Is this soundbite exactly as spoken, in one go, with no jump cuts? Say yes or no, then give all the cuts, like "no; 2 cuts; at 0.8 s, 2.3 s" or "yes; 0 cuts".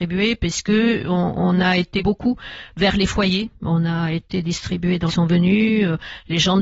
no; 2 cuts; at 2.0 s, 5.1 s